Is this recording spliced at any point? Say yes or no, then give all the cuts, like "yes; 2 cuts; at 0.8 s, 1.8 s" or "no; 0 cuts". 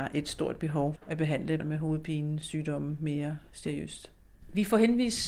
yes; 2 cuts; at 1.0 s, 1.6 s